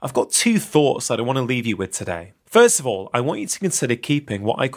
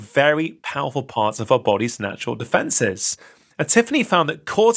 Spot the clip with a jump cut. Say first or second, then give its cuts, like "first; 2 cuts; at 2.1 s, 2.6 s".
first; 1 cut; at 2.4 s